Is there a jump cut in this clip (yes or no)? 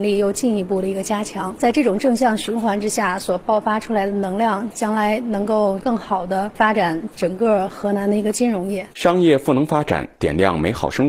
yes